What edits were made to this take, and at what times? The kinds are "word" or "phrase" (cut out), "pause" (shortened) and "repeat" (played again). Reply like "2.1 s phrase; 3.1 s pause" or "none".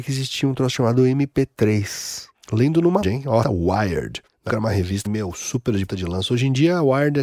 3.0 s word; 3.4 s word; 4.5 s word; 5.1 s word; 5.9 s word